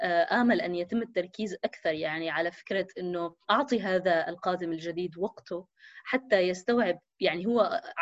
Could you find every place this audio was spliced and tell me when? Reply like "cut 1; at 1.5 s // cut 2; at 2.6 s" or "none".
cut 1; at 3.4 s